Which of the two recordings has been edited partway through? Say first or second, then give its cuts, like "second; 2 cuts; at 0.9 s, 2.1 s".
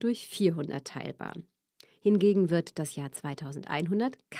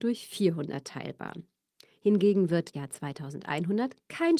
second; 1 cut; at 2.7 s